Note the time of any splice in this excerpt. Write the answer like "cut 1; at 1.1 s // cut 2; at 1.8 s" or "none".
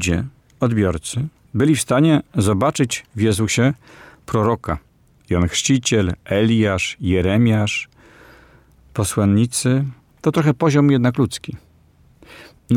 none